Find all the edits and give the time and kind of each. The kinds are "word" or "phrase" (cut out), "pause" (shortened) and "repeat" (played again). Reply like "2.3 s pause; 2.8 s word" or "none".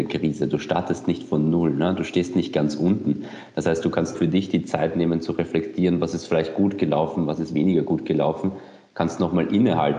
4.1 s word